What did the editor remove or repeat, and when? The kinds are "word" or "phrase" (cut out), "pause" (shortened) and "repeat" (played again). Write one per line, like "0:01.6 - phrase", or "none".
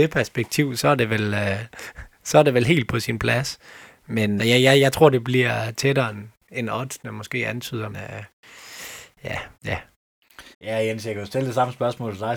0:04.4 - phrase
0:07.9 - word
0:09.5 - pause
0:10.5 - pause